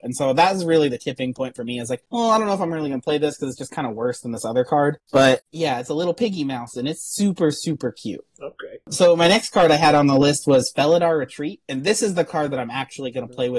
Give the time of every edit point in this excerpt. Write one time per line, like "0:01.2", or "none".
none